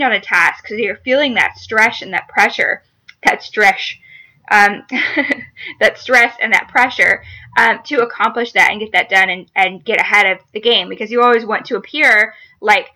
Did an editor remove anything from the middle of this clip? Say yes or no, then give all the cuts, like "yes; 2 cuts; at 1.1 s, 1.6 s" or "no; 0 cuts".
no; 0 cuts